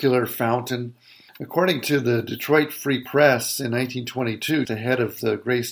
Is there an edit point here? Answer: yes; 1 cut; at 4.6 s

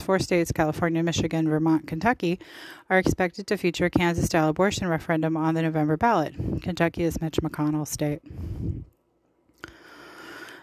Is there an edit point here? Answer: no; 0 cuts

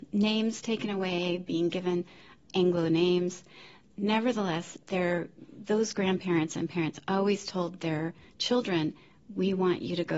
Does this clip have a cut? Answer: no; 0 cuts

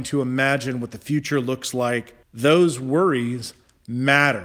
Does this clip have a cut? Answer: yes; 1 cut; at 2.2 s

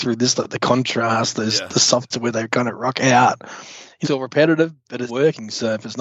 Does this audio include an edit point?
yes; 3 cuts; at 2.1 s, 4.0 s, 5.1 s

